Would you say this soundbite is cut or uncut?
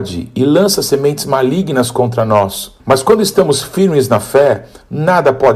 cut